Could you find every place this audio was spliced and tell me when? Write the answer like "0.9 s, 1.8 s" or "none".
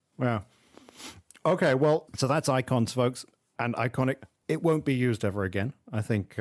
2.1 s, 4.4 s